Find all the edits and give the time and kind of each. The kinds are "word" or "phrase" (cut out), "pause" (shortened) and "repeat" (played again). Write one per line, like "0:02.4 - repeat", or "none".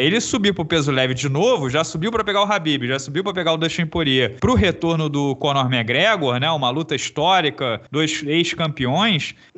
0:07.9 - pause